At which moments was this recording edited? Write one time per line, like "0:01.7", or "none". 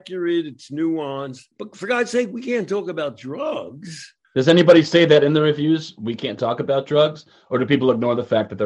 0:01.5
0:04.2